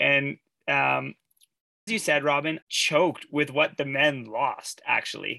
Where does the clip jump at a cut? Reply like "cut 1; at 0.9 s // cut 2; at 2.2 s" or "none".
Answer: cut 1; at 1.9 s // cut 2; at 2.6 s